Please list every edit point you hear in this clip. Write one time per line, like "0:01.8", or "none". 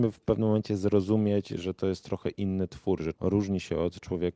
0:03.2